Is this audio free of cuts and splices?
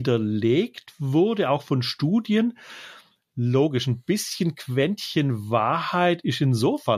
yes; 0 cuts

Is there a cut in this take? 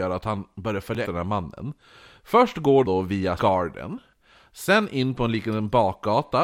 yes; 3 cuts; at 1.0 s, 2.8 s, 3.4 s

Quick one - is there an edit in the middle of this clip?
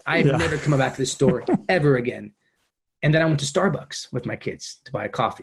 yes; 1 cut; at 2.7 s

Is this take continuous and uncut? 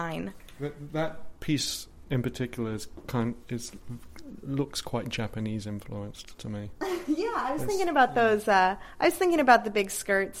yes; 0 cuts

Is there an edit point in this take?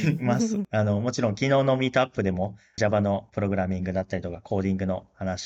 no; 0 cuts

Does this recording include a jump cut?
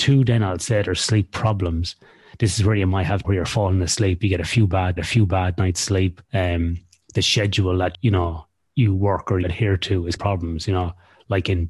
yes; 6 cuts; at 3.2 s, 5.0 s, 6.2 s, 7.9 s, 9.4 s, 10.2 s

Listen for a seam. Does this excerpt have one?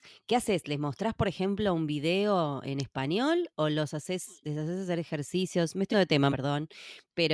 yes; 2 cuts; at 5.9 s, 6.3 s

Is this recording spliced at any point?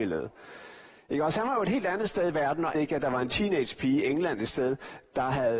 yes; 1 cut; at 2.7 s

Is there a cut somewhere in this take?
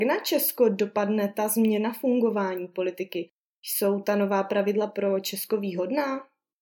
no; 0 cuts

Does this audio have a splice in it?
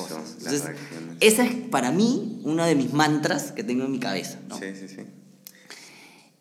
no; 0 cuts

